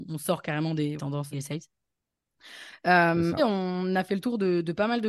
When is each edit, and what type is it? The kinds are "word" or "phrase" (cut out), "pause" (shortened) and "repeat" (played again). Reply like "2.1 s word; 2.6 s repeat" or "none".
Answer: 1.0 s phrase; 1.3 s phrase; 3.4 s word

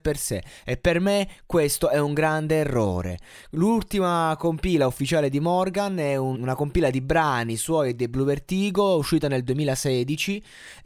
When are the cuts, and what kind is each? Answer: 6.3 s word

